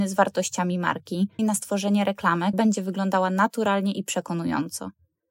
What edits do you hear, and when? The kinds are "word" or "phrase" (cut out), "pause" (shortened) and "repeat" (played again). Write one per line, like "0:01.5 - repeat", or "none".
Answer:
0:01.4 - word
0:02.5 - word

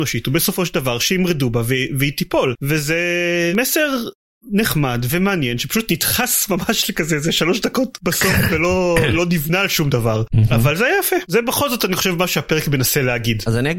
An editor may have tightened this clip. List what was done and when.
none

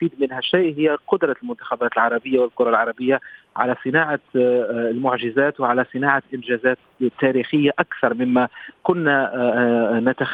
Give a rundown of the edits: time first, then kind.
none

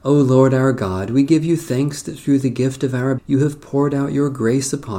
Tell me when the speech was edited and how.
0:03.2 - word

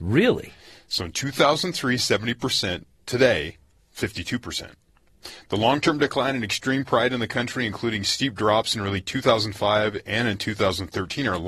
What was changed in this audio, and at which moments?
none

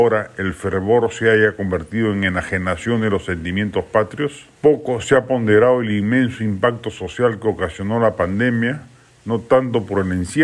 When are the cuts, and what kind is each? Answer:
0:04.5 - pause

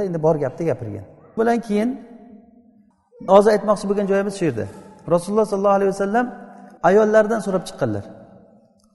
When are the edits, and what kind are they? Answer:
0:01.4 - word
0:03.3 - word
0:06.8 - pause

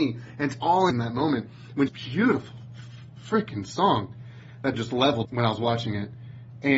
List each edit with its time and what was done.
0:00.9 - phrase
0:01.9 - phrase
0:04.7 - phrase
0:05.2 - word

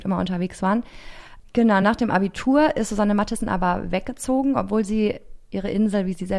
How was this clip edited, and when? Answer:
none

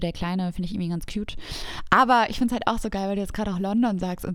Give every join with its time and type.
none

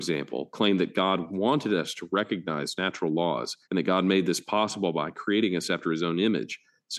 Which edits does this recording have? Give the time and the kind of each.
0:03.6 - pause

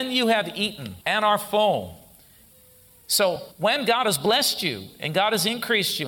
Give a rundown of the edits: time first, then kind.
0:01.0 - pause
0:03.5 - pause

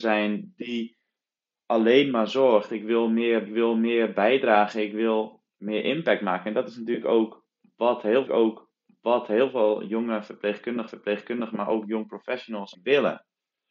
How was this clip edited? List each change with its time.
0:03.5 - repeat
0:08.3 - repeat
0:10.9 - repeat
0:12.7 - word

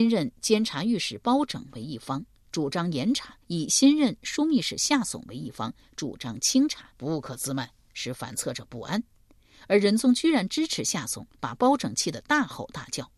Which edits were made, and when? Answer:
0:03.4 - pause
0:06.9 - pause
0:11.3 - pause

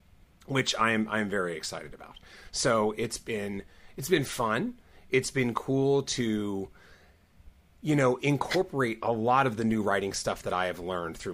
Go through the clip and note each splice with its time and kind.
none

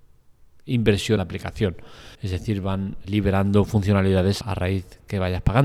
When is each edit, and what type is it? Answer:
0:01.2 - word
0:02.1 - pause
0:03.0 - word
0:04.4 - word

